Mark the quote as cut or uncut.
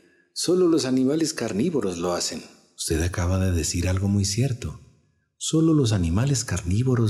uncut